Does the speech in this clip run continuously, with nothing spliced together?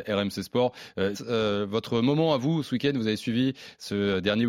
no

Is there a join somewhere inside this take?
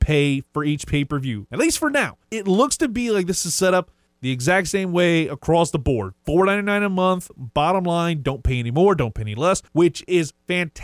yes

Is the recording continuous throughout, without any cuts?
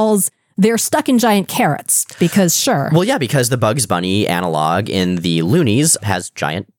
yes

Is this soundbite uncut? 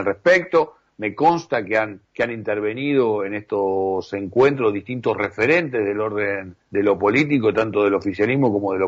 no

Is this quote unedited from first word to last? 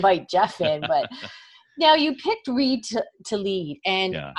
yes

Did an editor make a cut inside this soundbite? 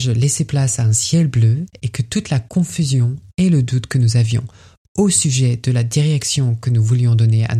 no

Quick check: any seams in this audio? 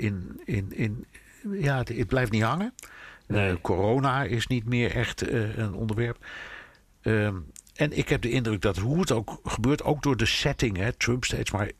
no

